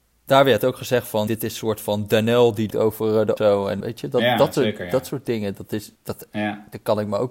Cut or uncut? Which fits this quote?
cut